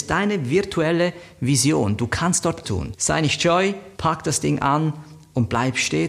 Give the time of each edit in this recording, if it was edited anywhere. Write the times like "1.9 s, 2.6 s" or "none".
2.6 s, 3.9 s